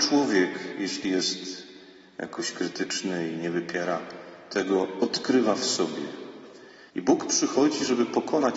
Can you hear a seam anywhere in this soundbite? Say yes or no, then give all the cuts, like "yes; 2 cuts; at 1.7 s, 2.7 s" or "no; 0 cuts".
yes; 1 cut; at 6.9 s